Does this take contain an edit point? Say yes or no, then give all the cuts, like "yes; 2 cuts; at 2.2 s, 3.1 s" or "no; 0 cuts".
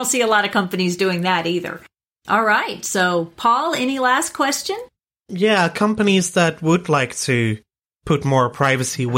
no; 0 cuts